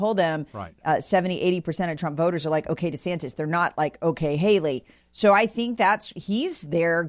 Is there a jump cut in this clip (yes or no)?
no